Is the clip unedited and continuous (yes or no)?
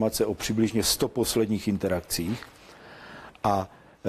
yes